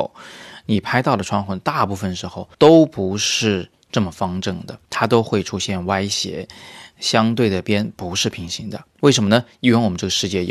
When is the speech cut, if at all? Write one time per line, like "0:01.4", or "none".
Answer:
0:02.5
0:04.8
0:08.9